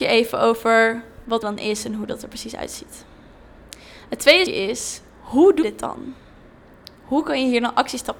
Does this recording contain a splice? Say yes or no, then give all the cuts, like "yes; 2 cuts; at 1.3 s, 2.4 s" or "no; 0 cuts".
yes; 3 cuts; at 1.4 s, 4.5 s, 5.6 s